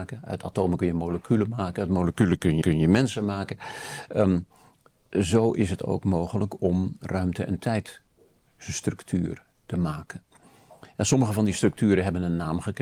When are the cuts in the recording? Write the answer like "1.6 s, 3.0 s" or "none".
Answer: 2.6 s